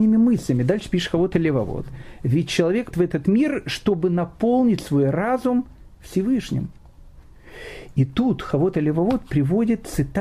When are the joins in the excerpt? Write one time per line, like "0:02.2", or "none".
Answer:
0:02.9